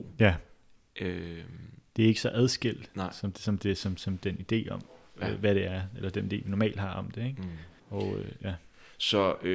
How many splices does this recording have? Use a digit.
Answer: 1